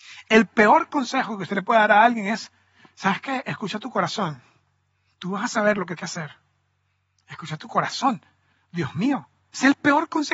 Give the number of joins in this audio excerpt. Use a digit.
1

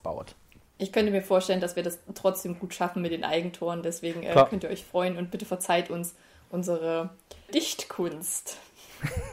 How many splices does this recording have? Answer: 1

